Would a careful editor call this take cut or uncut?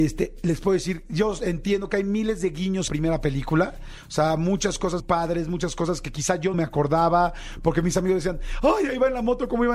cut